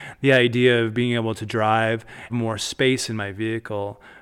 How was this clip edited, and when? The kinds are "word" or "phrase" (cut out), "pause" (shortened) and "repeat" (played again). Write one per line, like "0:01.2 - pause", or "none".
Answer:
0:02.3 - phrase